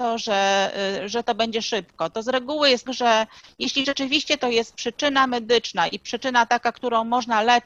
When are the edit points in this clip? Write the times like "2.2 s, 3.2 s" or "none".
2.9 s